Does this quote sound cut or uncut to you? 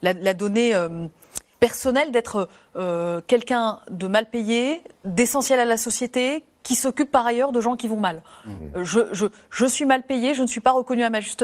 cut